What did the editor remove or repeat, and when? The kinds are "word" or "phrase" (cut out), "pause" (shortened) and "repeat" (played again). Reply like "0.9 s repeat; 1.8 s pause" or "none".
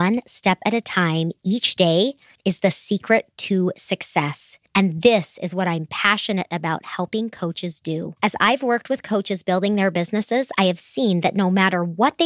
2.3 s pause; 4.7 s pause; 8.2 s pause